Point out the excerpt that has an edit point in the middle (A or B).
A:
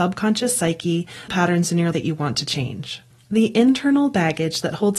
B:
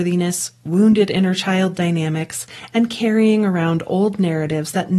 A